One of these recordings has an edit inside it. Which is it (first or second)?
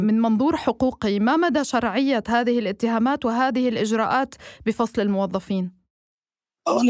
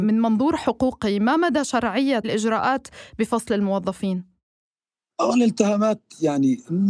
second